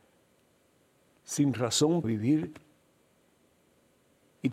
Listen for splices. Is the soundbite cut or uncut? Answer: cut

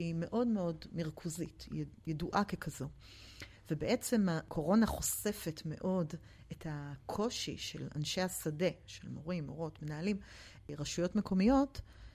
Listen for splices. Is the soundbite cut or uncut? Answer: cut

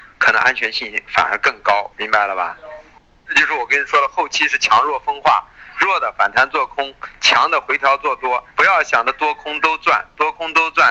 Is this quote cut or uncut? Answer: cut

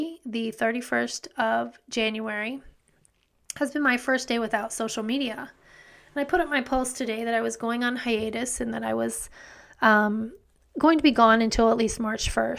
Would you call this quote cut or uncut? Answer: uncut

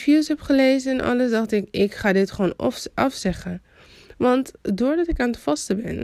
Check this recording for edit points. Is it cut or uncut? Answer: uncut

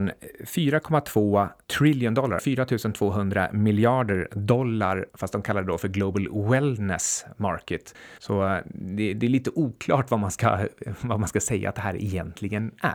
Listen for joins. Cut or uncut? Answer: cut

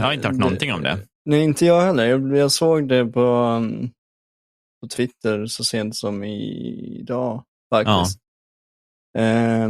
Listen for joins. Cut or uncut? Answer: uncut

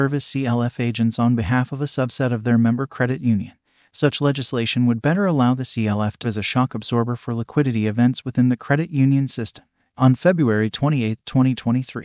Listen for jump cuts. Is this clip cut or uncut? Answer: cut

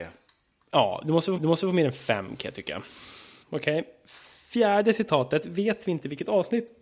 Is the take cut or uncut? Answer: cut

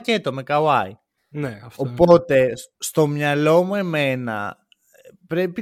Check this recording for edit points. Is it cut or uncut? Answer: cut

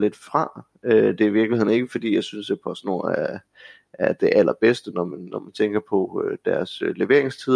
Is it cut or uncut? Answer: uncut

